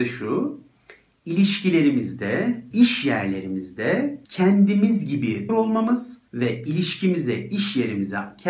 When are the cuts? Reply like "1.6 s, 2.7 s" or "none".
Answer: 2.7 s, 4.2 s, 5.5 s, 6.3 s